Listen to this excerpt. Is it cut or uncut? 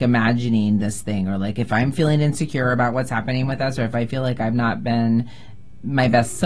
uncut